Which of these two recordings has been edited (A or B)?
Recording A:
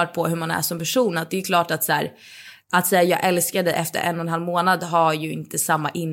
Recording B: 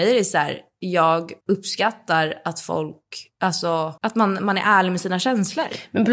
B